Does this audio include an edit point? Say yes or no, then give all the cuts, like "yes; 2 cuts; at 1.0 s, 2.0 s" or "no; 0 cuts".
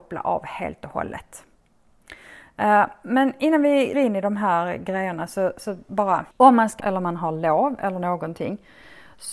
yes; 3 cuts; at 3.9 s, 6.3 s, 6.8 s